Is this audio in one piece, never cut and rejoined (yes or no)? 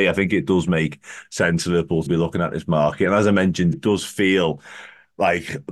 no